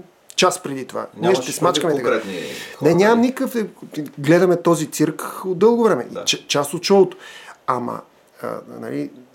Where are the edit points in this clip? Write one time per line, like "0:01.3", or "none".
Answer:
none